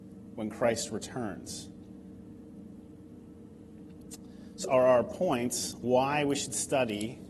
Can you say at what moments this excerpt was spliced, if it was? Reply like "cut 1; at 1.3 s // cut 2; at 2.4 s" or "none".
cut 1; at 4.6 s // cut 2; at 5.8 s